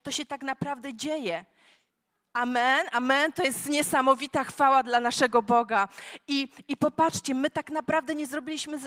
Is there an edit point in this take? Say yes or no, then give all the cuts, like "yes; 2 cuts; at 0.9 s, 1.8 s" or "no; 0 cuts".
no; 0 cuts